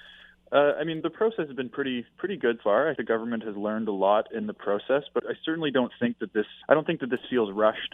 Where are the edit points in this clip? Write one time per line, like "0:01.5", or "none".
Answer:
0:01.0
0:02.1
0:02.6
0:03.0
0:05.2
0:06.6